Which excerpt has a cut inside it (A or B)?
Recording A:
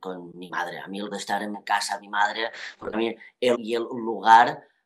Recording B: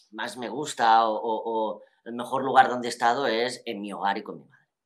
A